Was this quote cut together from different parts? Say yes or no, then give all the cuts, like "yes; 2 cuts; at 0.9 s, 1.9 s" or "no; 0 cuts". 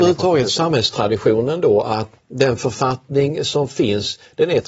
yes; 1 cut; at 2.1 s